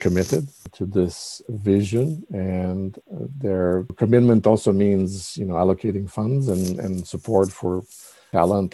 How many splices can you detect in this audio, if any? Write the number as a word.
one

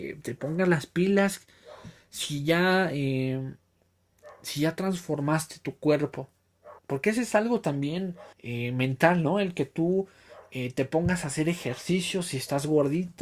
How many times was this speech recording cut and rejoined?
two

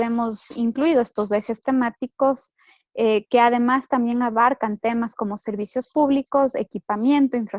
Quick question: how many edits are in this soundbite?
zero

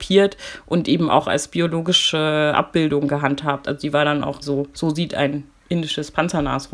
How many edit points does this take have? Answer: one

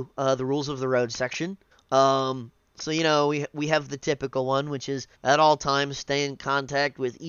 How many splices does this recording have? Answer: two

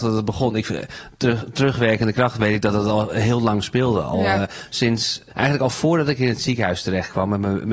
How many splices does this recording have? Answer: one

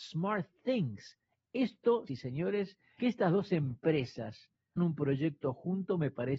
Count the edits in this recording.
three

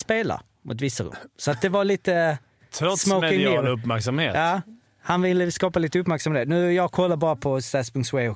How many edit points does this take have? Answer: zero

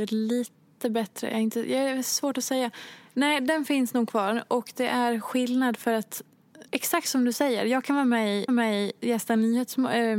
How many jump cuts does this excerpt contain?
two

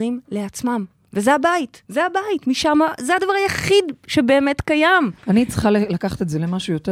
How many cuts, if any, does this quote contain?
two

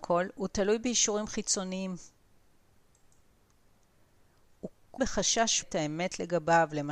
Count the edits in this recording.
two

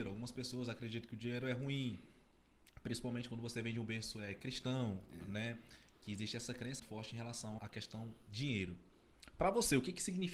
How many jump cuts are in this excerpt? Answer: two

